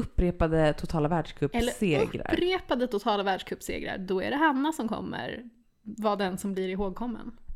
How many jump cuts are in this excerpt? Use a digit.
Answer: 0